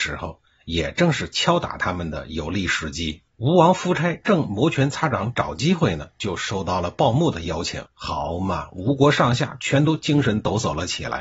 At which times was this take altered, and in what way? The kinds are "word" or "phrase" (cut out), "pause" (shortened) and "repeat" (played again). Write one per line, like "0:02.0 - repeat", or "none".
0:03.3 - pause
0:07.9 - pause